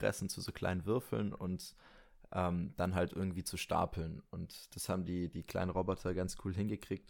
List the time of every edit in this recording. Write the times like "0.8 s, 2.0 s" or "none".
none